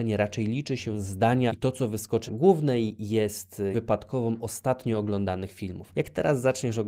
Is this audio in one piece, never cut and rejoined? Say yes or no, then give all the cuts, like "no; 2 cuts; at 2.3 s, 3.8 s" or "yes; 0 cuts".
no; 3 cuts; at 1.5 s, 2.3 s, 3.7 s